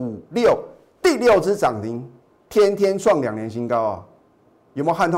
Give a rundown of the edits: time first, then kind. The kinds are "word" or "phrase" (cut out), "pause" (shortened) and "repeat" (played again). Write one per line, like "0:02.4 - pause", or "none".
0:02.2 - pause